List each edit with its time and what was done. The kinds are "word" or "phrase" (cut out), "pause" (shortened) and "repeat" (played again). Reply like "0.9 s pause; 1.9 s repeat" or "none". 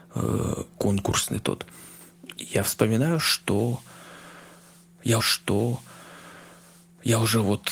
5.2 s repeat

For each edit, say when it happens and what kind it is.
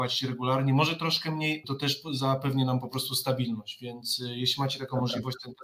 1.6 s phrase

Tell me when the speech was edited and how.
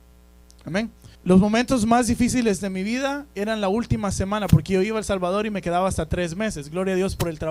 1.1 s pause

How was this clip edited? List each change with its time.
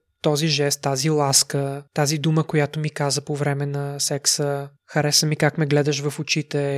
1.9 s pause; 4.8 s pause

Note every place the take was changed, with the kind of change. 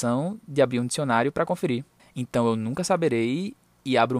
2.0 s pause

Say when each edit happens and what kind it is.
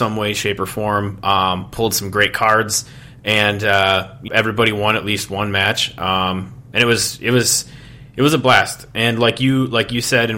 4.3 s word

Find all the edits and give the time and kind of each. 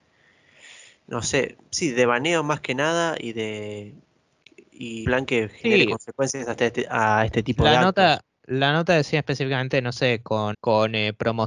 5.0 s word; 10.5 s word

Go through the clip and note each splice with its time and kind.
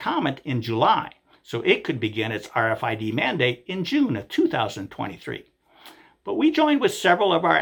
none

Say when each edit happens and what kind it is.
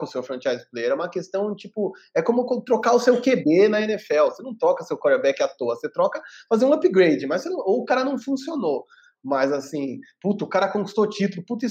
none

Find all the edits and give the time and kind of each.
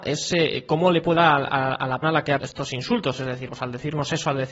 1.2 s word; 2.0 s word; 2.4 s word; 3.5 s word

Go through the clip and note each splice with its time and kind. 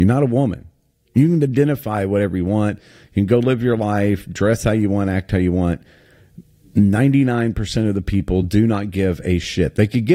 none

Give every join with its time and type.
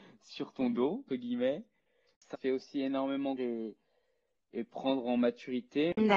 1.1 s word; 2.3 s word; 3.4 s word; 4.5 s word

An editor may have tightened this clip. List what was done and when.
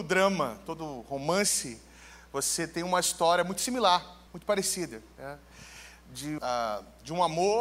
4.3 s pause; 5.1 s pause; 6.4 s word

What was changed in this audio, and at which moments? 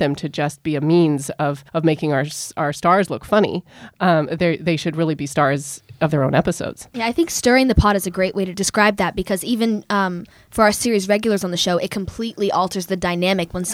1.7 s pause

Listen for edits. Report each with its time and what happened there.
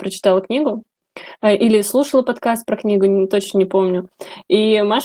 none

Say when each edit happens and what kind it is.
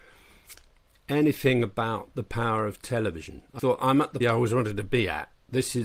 3.6 s word; 4.2 s word

